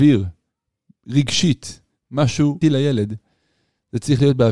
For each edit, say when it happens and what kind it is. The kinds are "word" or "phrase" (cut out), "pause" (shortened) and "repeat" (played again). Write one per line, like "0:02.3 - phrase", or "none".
0:02.6 - word